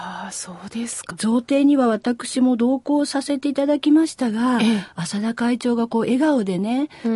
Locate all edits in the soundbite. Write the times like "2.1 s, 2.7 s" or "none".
1.1 s